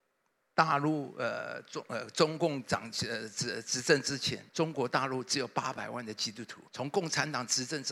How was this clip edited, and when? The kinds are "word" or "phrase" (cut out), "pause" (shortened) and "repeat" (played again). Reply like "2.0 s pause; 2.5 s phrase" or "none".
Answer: 4.5 s pause; 6.7 s pause